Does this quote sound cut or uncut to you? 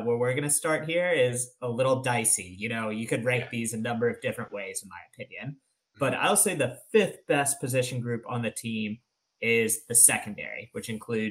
uncut